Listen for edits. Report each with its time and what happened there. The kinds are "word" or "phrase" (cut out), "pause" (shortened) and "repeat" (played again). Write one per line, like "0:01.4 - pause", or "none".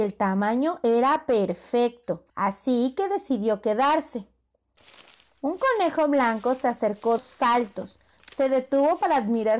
0:02.3 - pause
0:07.2 - word